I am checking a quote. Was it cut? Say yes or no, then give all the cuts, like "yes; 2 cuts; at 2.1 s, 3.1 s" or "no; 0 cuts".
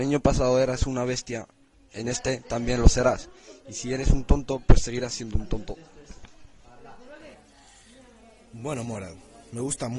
no; 0 cuts